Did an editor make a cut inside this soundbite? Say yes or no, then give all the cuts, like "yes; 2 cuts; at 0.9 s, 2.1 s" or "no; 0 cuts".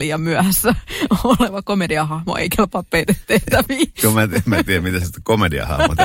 no; 0 cuts